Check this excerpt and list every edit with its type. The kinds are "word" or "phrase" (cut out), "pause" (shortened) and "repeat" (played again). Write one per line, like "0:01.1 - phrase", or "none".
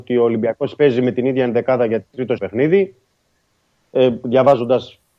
0:02.4 - word